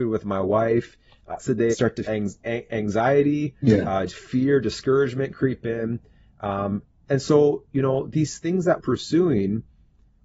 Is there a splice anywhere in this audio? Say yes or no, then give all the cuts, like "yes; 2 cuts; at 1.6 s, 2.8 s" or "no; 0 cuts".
yes; 6 cuts; at 1.4 s, 1.7 s, 2.1 s, 4.1 s, 7.1 s, 8.8 s